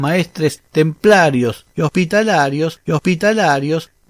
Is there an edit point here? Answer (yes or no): yes